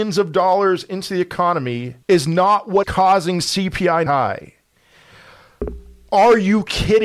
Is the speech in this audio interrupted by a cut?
yes; 3 cuts; at 2.0 s, 2.8 s, 4.1 s

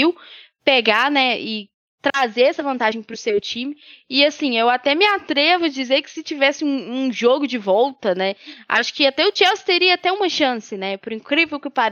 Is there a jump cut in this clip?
no; 0 cuts

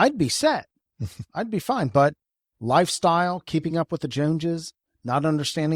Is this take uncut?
yes; 0 cuts

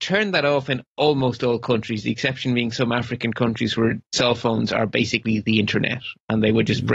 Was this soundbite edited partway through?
no; 0 cuts

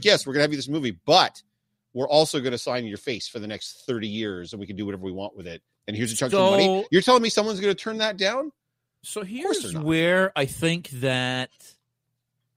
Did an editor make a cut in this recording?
no; 0 cuts

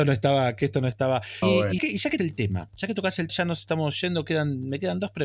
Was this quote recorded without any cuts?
no; 5 cuts; at 1.4 s, 1.8 s, 2.2 s, 2.7 s, 3.3 s

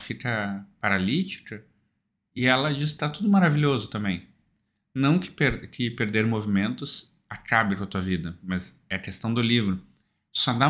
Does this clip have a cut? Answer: no; 0 cuts

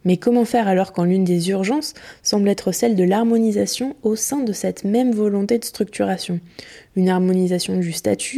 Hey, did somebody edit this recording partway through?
no; 0 cuts

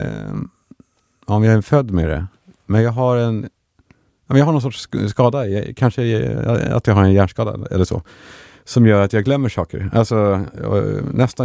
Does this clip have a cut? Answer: no; 0 cuts

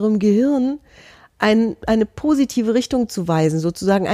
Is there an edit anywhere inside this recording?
no; 0 cuts

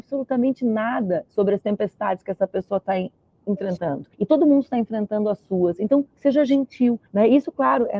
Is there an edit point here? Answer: yes; 2 cuts; at 4.1 s, 7.1 s

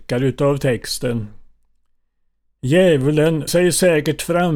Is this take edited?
yes; 1 cut; at 3.5 s

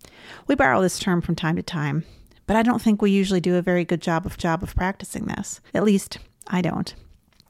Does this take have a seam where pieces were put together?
yes; 2 cuts; at 4.4 s, 5.7 s

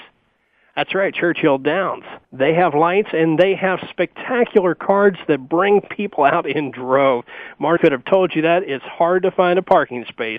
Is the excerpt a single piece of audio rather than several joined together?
no; 3 cuts; at 2.2 s, 3.9 s, 7.8 s

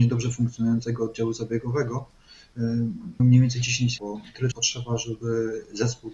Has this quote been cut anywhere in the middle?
yes; 3 cuts; at 3.2 s, 4.0 s, 4.5 s

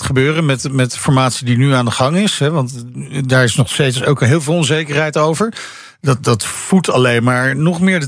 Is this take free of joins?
yes; 0 cuts

